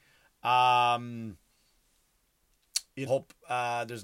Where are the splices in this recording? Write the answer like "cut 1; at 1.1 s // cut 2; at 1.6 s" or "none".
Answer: cut 1; at 3.1 s

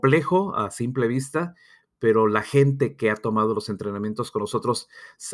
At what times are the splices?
none

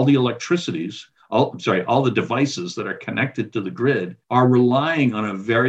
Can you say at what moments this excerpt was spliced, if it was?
cut 1; at 4.2 s

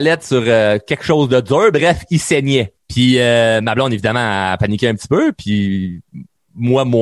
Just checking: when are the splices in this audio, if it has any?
cut 1; at 2.8 s

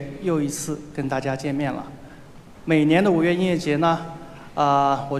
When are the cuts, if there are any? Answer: none

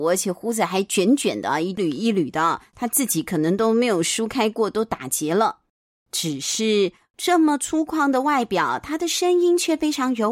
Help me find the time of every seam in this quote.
cut 1; at 5.9 s

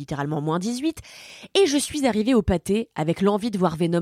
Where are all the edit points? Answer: none

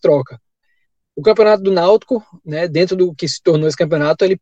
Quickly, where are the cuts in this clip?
none

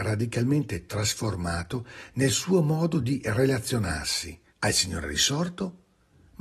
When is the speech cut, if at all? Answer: cut 1; at 4.5 s

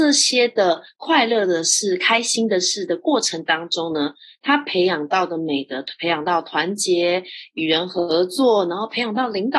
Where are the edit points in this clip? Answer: none

